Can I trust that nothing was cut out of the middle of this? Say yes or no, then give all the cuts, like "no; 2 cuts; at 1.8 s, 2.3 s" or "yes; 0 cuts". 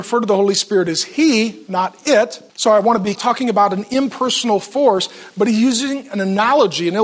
no; 2 cuts; at 2.5 s, 3.2 s